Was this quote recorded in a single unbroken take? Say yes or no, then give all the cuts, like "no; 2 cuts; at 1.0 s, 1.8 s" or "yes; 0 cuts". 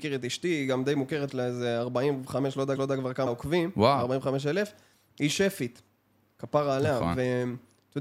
no; 3 cuts; at 1.3 s, 2.7 s, 3.3 s